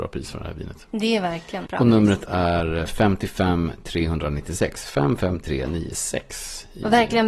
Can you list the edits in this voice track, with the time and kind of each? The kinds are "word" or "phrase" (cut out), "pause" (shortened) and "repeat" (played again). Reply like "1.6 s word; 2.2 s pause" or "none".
1.7 s word